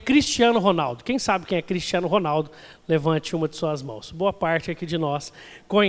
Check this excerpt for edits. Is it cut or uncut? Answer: uncut